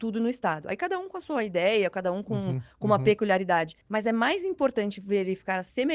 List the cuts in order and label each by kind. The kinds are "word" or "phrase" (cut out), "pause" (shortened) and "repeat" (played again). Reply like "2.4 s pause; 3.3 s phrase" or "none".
3.8 s pause